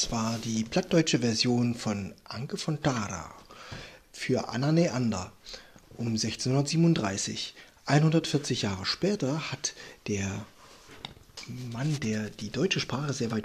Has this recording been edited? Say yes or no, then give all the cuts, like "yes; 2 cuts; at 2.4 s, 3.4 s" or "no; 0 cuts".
no; 0 cuts